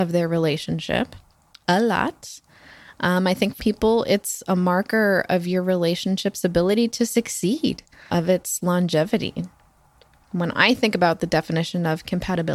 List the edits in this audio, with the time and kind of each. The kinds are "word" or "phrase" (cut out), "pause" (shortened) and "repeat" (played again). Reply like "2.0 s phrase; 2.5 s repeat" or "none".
3.6 s word; 8.1 s word